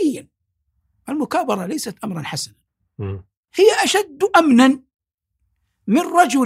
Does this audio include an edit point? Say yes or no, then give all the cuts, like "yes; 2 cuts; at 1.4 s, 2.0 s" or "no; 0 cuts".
no; 0 cuts